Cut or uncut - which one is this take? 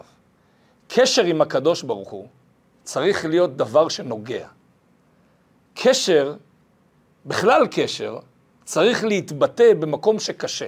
uncut